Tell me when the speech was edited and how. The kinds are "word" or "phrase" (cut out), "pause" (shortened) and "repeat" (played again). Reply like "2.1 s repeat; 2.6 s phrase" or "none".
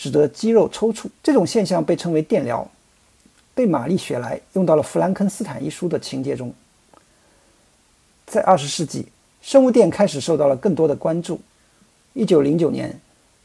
1.2 s pause